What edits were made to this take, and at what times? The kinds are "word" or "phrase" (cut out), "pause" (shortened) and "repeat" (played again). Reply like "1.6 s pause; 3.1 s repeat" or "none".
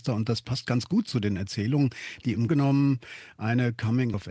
2.5 s word